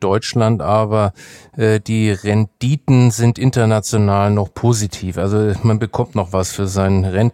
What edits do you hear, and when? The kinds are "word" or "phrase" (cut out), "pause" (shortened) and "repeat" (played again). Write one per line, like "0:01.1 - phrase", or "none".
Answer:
none